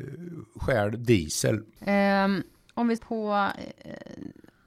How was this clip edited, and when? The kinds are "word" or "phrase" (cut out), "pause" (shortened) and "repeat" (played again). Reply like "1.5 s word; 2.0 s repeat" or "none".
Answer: 3.0 s phrase